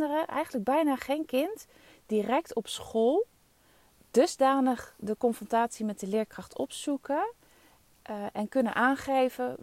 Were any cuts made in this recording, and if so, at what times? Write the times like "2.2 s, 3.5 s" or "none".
none